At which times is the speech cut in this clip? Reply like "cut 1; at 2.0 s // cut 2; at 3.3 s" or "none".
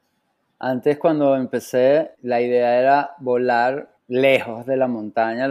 cut 1; at 2.1 s // cut 2; at 4.0 s